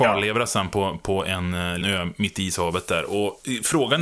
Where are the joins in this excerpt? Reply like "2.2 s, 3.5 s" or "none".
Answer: 1.8 s